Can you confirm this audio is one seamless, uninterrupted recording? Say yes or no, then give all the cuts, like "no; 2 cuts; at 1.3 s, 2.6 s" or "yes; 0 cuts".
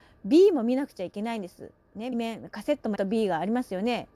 no; 2 cuts; at 2.1 s, 3.0 s